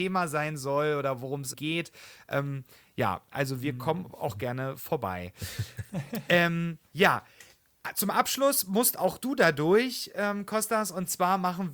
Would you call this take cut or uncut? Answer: cut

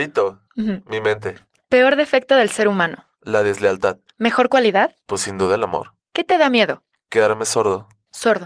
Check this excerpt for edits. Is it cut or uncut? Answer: uncut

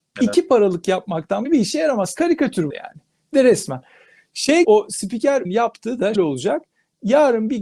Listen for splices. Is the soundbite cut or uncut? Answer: cut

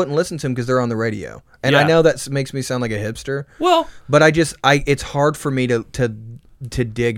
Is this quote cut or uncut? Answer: uncut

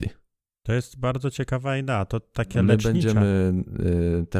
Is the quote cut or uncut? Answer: uncut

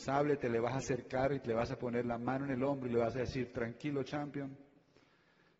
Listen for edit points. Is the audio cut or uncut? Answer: uncut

